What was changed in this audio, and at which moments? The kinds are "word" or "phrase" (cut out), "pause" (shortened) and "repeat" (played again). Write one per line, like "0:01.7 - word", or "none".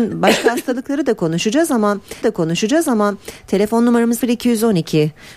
0:02.2 - repeat
0:04.2 - word